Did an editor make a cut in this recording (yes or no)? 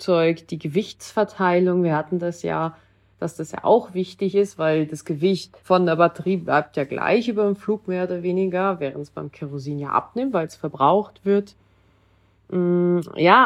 yes